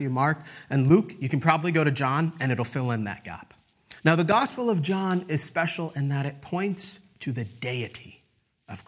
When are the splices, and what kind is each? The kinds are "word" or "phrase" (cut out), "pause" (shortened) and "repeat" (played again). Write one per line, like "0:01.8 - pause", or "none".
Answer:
0:04.0 - pause